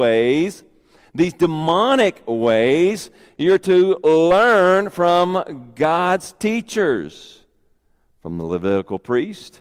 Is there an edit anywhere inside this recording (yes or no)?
no